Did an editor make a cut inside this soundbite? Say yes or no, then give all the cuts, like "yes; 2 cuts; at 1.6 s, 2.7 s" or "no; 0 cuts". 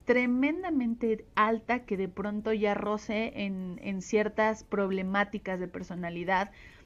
no; 0 cuts